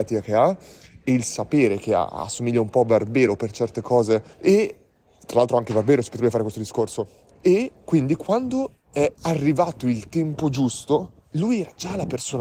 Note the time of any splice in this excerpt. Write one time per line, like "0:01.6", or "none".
0:04.3
0:09.2